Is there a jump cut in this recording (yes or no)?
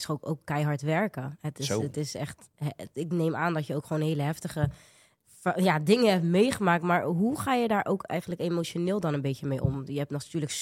no